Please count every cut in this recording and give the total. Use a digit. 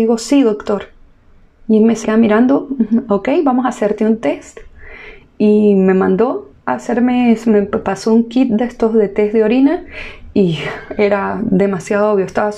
2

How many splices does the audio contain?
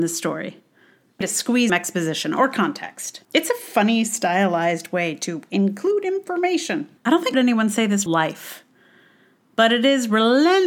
6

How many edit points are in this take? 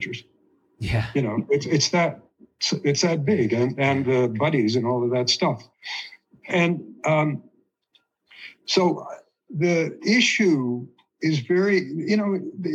1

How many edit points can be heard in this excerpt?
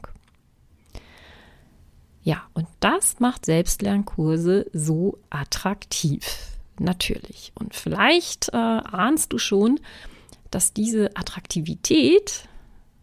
0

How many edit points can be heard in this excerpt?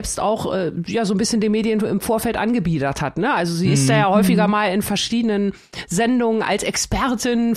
0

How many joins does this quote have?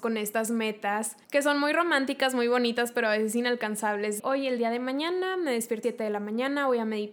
3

